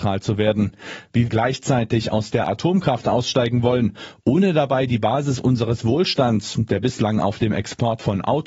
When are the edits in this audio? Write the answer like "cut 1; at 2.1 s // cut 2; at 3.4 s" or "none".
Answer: cut 1; at 1.3 s // cut 2; at 2.3 s